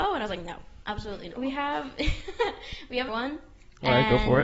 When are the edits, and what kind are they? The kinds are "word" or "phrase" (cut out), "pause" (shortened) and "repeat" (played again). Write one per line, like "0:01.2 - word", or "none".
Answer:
0:01.3 - word
0:03.1 - word